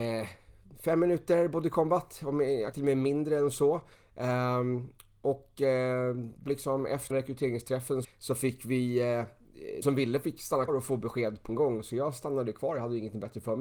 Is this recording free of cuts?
no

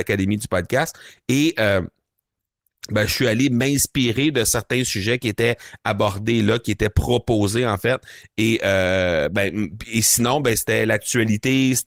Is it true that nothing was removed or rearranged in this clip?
yes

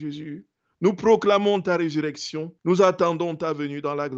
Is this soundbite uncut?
no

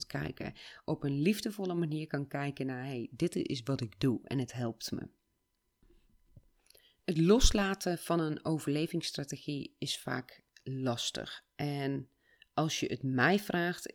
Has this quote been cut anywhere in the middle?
no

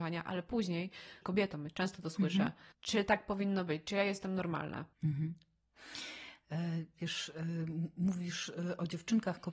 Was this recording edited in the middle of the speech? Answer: yes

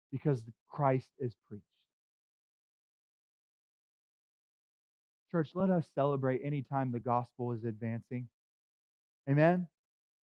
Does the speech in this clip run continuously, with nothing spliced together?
yes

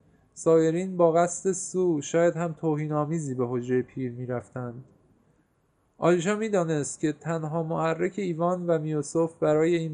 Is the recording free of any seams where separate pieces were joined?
yes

